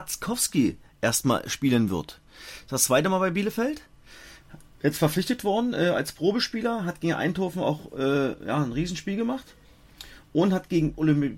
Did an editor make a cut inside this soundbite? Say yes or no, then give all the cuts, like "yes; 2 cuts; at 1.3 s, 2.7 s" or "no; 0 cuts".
no; 0 cuts